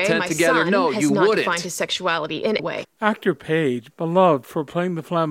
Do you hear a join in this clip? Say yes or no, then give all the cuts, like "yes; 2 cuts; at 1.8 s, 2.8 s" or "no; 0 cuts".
yes; 2 cuts; at 2.6 s, 3.4 s